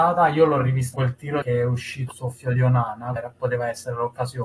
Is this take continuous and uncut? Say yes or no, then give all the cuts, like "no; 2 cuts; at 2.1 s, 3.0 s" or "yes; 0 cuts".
no; 4 cuts; at 0.9 s, 1.4 s, 2.1 s, 3.2 s